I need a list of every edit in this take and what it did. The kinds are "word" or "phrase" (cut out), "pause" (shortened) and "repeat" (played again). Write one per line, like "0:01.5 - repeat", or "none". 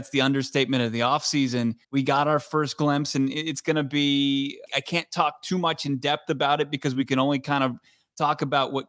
0:01.8 - pause
0:04.7 - word